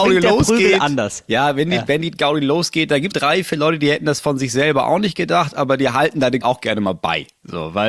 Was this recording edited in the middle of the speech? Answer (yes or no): yes